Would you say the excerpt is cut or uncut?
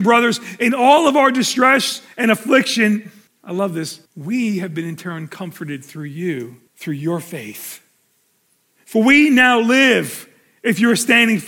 cut